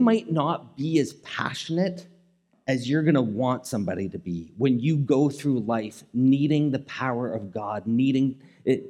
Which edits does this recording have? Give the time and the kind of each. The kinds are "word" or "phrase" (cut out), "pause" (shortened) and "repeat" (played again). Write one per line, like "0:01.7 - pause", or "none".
none

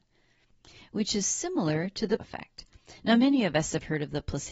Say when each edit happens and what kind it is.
0:02.2 - word

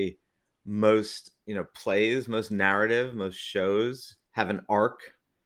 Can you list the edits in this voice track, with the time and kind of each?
0:04.2 - pause

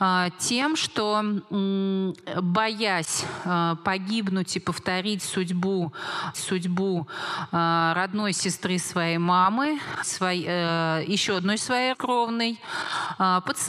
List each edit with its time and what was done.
0:06.3 - repeat
0:10.0 - word
0:11.9 - word

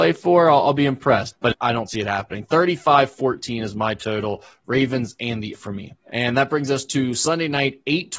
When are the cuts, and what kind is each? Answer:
0:01.6 - word
0:05.5 - word
0:06.0 - pause

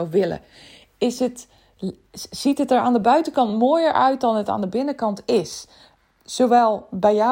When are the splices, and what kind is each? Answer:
none

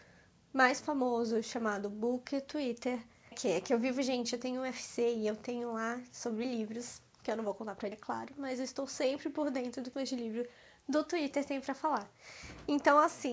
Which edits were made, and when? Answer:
0:03.3 - word
0:07.9 - word
0:09.9 - word

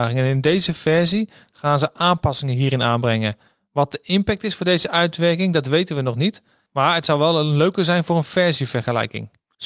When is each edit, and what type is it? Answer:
none

